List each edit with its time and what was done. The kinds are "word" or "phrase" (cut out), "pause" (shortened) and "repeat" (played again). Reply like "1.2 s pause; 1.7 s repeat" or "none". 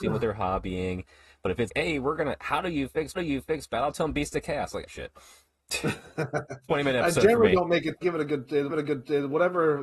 1.7 s word; 3.2 s repeat; 4.9 s phrase; 8.0 s phrase; 8.7 s repeat